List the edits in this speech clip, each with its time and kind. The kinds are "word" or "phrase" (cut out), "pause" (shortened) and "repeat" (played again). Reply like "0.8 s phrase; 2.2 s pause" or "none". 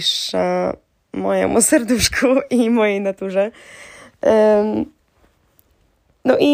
none